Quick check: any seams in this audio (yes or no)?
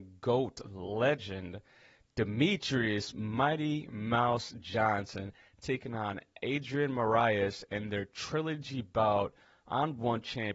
no